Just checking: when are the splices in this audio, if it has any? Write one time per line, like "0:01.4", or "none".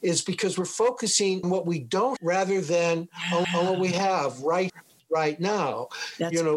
0:01.4
0:02.2
0:03.4
0:04.7